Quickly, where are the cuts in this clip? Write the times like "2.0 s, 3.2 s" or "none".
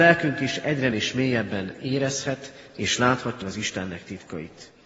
0.9 s, 3.4 s

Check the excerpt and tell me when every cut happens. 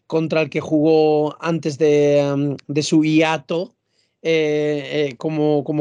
none

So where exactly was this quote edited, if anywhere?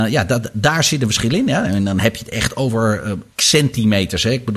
3.3 s

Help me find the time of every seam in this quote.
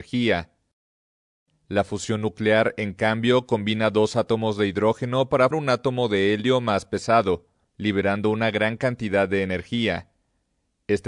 5.5 s

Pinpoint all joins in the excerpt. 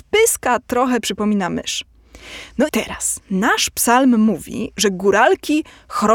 2.7 s

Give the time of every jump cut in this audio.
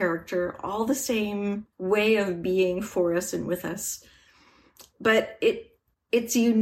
1.7 s

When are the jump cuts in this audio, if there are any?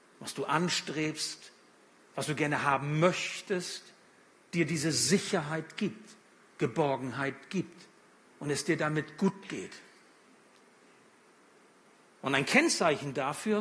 none

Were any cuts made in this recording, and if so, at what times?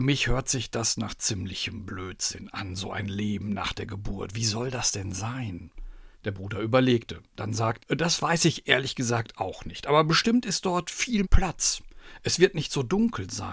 6.1 s, 7.3 s, 7.8 s, 11.2 s

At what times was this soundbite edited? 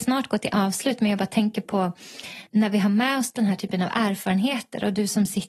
2.5 s

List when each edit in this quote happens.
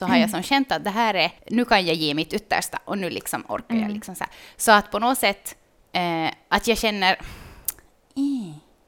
1.4 s

